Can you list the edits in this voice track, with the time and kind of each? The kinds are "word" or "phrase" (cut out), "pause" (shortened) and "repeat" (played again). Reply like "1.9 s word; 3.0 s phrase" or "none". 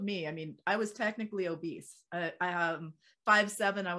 none